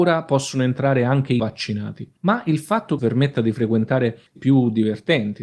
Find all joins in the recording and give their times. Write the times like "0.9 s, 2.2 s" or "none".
1.4 s, 2.2 s, 3.0 s, 4.4 s